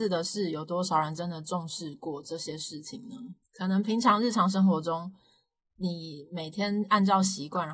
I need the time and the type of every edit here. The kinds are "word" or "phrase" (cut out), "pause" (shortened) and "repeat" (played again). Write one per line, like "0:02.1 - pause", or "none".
none